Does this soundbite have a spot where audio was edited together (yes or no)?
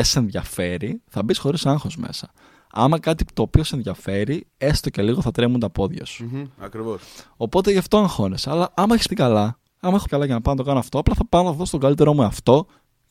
yes